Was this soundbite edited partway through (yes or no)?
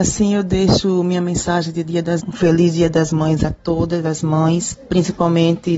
yes